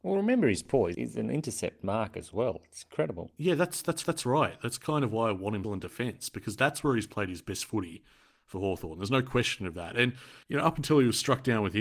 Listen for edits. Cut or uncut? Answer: cut